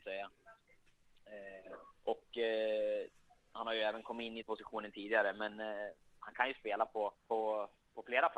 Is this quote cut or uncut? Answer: cut